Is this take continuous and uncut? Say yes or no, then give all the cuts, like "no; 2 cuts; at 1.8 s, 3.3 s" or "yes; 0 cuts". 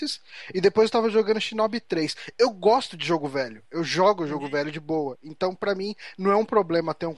yes; 0 cuts